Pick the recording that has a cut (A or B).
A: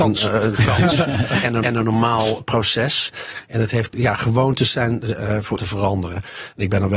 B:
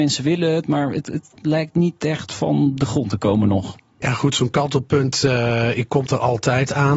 A